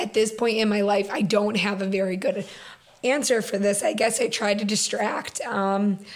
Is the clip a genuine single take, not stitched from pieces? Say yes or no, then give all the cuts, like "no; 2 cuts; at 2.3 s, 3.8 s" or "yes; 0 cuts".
yes; 0 cuts